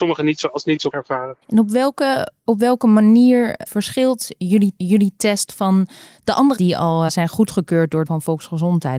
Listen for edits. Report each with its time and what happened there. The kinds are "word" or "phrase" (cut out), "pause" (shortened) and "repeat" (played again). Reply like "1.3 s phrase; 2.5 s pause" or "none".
0.9 s word; 2.4 s pause; 3.7 s word; 4.8 s repeat; 6.6 s word; 7.1 s word; 8.1 s word